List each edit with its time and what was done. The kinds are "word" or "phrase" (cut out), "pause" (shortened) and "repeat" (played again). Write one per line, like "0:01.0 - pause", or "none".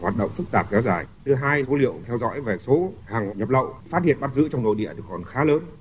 0:01.1 - pause
0:01.6 - phrase
0:03.3 - word